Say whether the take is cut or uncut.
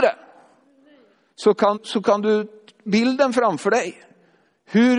cut